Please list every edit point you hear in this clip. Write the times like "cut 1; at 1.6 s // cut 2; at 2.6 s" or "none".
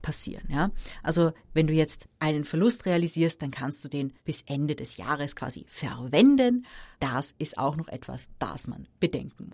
cut 1; at 4.2 s // cut 2; at 6.9 s